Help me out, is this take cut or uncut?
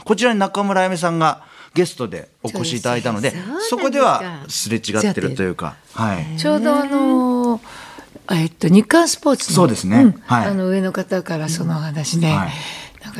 uncut